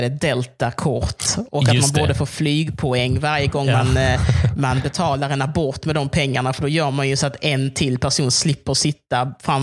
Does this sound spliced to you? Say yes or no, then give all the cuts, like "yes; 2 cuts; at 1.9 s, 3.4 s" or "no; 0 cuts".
no; 0 cuts